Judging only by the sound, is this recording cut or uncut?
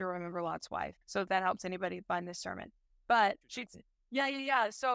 cut